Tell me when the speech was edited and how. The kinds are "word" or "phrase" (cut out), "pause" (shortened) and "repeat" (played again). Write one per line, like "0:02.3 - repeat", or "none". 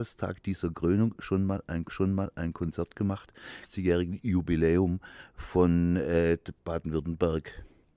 0:01.8 - repeat
0:03.6 - phrase